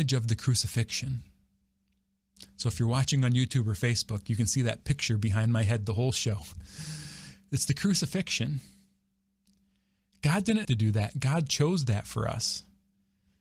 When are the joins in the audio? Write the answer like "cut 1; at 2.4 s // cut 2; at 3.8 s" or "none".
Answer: cut 1; at 10.6 s